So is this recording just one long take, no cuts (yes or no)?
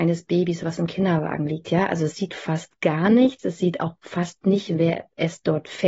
yes